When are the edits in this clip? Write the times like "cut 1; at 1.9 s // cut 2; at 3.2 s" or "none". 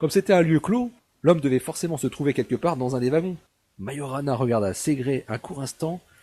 cut 1; at 1.0 s // cut 2; at 3.5 s